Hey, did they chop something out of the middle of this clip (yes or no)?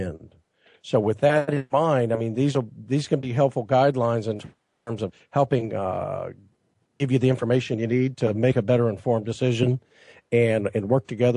no